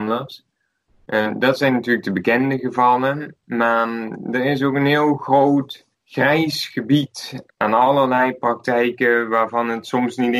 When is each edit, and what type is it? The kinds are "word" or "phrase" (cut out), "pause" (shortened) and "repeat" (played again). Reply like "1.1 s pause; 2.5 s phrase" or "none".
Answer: 7.5 s pause